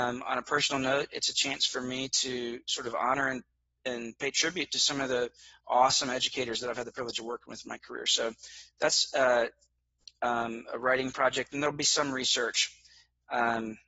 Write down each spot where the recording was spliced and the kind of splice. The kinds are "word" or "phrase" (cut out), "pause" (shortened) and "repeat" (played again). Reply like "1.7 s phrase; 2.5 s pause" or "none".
none